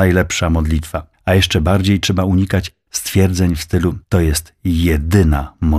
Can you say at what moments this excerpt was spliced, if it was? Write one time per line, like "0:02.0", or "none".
0:01.1
0:04.0